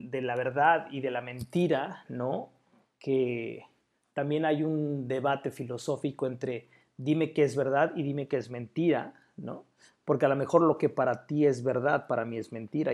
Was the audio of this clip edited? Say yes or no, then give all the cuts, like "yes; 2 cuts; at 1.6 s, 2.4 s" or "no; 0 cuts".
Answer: no; 0 cuts